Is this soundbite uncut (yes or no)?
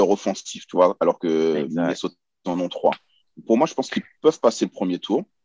yes